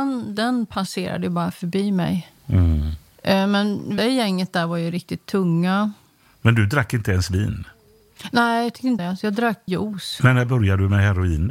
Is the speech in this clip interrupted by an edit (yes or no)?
yes